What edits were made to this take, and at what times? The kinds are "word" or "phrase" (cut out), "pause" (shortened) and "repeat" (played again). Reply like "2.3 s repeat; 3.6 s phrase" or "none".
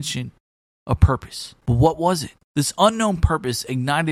1.6 s pause; 2.4 s pause